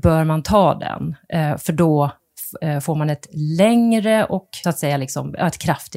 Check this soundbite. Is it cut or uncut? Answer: cut